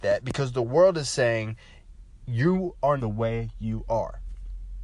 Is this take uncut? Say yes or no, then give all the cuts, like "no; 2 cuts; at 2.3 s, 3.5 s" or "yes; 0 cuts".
no; 1 cut; at 3.0 s